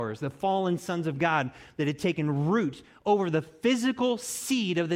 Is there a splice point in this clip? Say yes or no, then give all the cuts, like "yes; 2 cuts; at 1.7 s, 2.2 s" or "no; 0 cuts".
no; 0 cuts